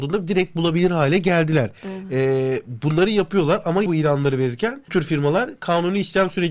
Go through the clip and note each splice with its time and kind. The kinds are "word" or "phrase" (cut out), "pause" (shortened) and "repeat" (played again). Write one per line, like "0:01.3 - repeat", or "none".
0:03.9 - word
0:04.9 - word